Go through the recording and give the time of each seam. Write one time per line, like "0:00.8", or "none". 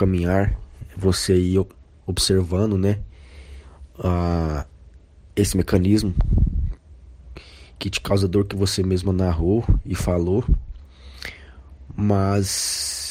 none